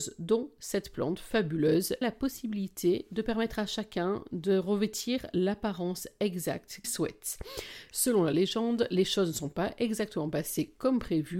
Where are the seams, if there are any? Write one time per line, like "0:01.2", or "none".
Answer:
0:02.0
0:06.8